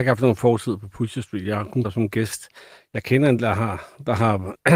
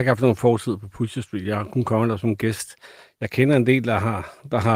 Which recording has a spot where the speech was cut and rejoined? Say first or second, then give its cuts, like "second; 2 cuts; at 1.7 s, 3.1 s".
first; 2 cuts; at 1.8 s, 3.4 s